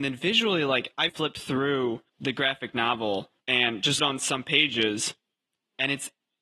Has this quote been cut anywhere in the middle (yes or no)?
yes